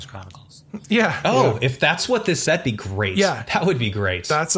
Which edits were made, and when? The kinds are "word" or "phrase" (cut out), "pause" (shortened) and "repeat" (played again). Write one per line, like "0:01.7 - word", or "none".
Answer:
0:02.5 - word